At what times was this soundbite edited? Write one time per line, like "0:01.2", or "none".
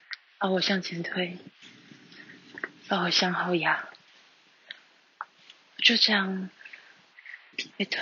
none